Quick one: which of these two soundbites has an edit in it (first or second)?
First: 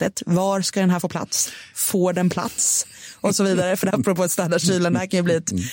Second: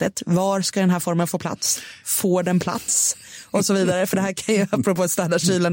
first